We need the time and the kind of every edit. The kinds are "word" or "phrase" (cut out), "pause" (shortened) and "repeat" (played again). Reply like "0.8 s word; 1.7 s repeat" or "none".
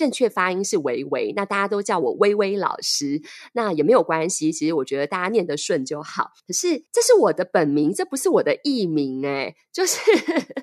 6.4 s pause; 6.9 s pause